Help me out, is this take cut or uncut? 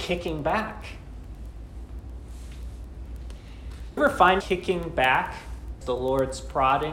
cut